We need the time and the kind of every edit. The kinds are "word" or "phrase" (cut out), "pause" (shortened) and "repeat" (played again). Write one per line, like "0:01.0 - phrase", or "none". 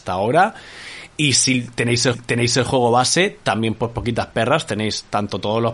0:02.1 - repeat

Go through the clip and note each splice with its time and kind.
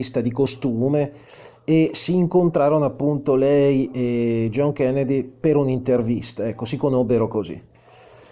none

